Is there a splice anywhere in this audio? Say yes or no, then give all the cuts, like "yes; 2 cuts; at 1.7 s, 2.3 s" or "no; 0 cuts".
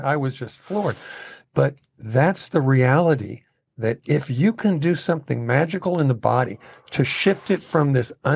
no; 0 cuts